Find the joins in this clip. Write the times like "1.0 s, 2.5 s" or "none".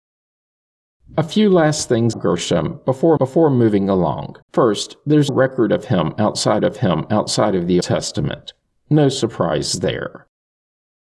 2.1 s, 3.2 s, 4.4 s, 5.3 s, 6.6 s, 7.8 s